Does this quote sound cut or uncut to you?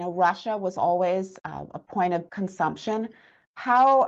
cut